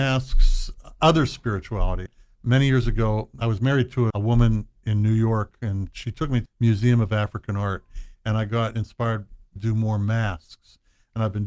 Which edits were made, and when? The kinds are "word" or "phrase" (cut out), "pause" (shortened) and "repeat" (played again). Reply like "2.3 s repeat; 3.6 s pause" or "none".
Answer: 4.1 s word; 9.6 s phrase